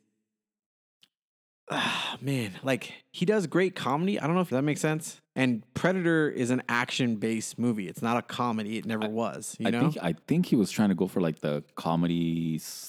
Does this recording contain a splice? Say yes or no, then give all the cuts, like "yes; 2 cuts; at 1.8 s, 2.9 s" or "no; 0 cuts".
yes; 2 cuts; at 4.5 s, 5.2 s